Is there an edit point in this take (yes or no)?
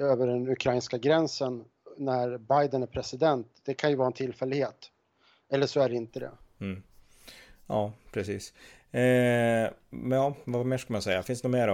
no